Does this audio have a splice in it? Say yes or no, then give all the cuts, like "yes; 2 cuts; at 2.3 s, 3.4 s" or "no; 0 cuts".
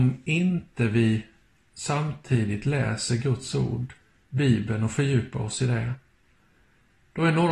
no; 0 cuts